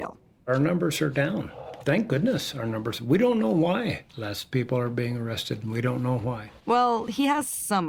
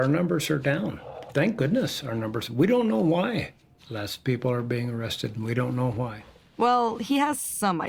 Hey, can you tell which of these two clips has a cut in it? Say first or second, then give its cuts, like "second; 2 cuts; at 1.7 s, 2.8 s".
first; 2 cuts; at 4.1 s, 6.6 s